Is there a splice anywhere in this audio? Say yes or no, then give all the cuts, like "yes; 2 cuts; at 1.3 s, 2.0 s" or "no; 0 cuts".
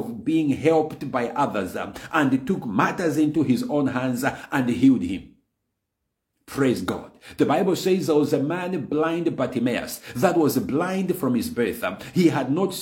no; 0 cuts